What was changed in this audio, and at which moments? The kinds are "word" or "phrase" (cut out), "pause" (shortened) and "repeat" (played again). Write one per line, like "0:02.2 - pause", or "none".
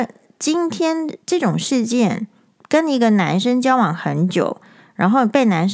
0:01.2 - pause